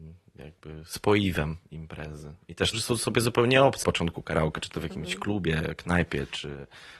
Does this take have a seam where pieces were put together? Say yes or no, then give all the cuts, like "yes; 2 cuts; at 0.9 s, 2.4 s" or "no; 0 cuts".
yes; 2 cuts; at 2.7 s, 3.8 s